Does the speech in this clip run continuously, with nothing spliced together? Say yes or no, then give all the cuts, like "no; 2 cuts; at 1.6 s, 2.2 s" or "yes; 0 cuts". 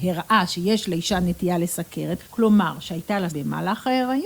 no; 2 cuts; at 2.3 s, 3.3 s